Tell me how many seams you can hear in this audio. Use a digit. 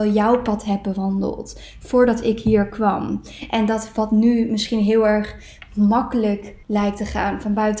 1